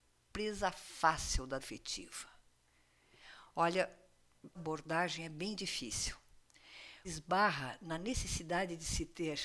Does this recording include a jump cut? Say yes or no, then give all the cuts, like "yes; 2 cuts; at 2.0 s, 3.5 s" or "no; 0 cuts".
yes; 3 cuts; at 1.6 s, 4.6 s, 7.0 s